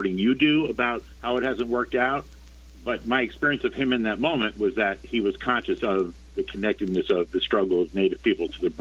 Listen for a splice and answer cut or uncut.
cut